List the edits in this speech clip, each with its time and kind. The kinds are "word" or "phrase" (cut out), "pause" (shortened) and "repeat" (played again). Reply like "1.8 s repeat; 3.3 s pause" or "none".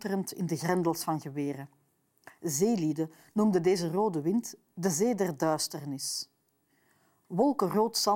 none